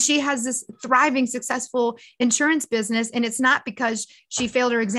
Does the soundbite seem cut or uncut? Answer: uncut